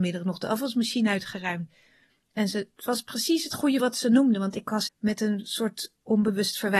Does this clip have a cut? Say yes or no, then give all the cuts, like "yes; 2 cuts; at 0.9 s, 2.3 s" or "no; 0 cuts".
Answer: yes; 3 cuts; at 2.8 s, 3.8 s, 4.9 s